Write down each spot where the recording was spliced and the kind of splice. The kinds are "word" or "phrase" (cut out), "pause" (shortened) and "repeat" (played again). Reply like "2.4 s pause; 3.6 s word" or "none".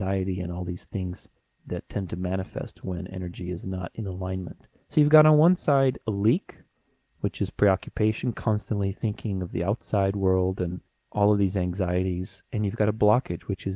1.4 s pause; 4.8 s pause; 10.9 s pause